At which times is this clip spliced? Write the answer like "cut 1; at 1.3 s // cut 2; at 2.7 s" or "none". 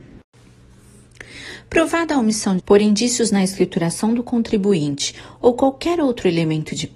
cut 1; at 2.6 s